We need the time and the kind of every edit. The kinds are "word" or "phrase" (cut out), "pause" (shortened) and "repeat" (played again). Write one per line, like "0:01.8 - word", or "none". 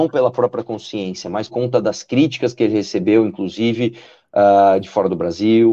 0:01.5 - word